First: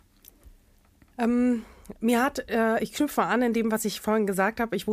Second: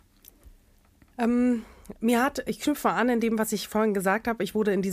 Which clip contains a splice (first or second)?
second